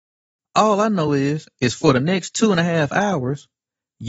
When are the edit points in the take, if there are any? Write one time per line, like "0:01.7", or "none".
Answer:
none